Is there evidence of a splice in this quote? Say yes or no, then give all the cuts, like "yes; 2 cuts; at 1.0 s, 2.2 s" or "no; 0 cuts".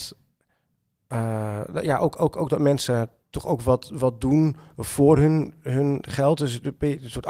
no; 0 cuts